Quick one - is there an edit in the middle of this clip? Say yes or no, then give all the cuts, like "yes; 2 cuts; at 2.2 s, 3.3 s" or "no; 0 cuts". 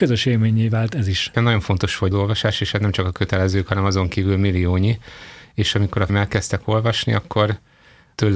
yes; 2 cuts; at 2.1 s, 6.1 s